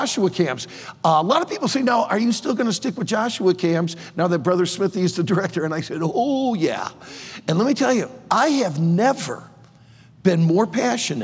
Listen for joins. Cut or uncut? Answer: uncut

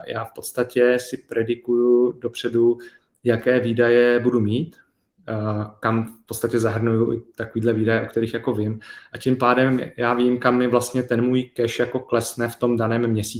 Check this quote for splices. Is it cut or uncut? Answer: uncut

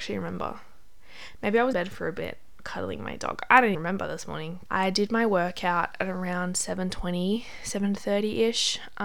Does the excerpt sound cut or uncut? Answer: cut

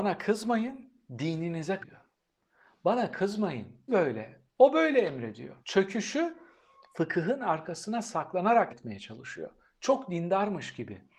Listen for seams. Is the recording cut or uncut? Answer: cut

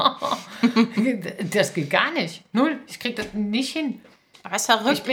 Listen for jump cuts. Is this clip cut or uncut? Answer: uncut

